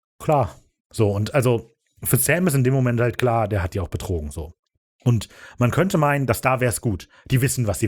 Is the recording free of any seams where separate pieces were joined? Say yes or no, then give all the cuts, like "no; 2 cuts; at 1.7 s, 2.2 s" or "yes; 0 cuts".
yes; 0 cuts